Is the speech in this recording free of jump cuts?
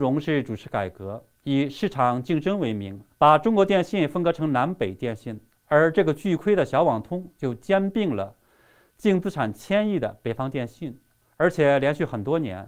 no; 1 cut; at 3.1 s

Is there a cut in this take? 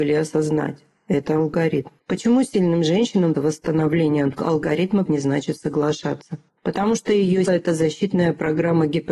yes; 5 cuts; at 2.0 s, 3.3 s, 5.1 s, 6.5 s, 7.5 s

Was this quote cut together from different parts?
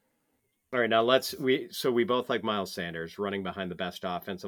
no; 0 cuts

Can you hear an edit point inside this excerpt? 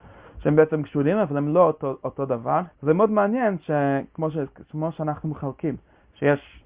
yes; 1 cut; at 2.7 s

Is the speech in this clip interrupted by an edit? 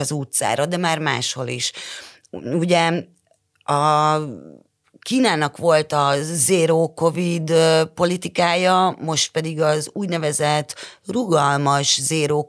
no; 0 cuts

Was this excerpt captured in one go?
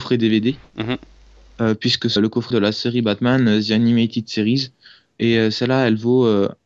no; 2 cuts; at 2.2 s, 2.5 s

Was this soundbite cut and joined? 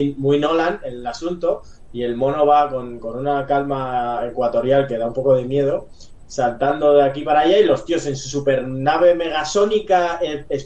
no; 0 cuts

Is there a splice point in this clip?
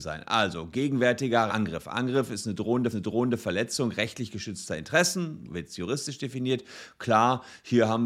yes; 3 cuts; at 1.5 s, 2.9 s, 5.4 s

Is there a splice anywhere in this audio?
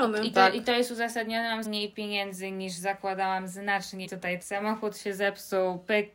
yes; 3 cuts; at 1.6 s, 4.0 s, 4.4 s

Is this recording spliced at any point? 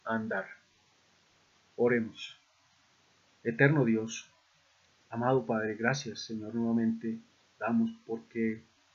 no; 0 cuts

